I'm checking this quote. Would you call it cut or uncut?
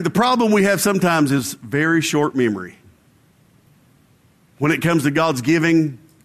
uncut